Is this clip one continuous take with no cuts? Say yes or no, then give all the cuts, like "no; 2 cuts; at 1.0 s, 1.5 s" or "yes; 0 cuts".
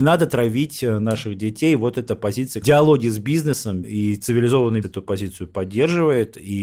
no; 3 cuts; at 2.6 s, 3.8 s, 4.8 s